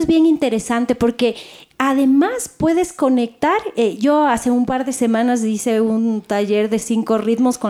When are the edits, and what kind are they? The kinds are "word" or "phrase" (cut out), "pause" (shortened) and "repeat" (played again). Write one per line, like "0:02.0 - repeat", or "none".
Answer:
none